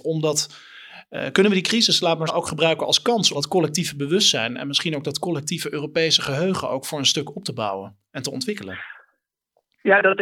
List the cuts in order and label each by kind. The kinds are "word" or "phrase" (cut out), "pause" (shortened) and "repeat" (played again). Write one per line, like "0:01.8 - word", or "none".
0:02.3 - word
0:03.3 - word

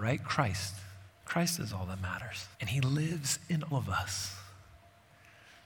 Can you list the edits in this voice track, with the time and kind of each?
0:01.1 - pause
0:02.5 - pause
0:03.7 - word

